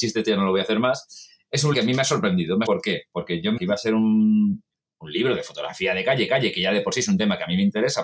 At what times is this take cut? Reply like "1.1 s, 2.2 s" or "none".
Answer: 1.7 s, 2.7 s, 3.6 s, 4.7 s, 6.3 s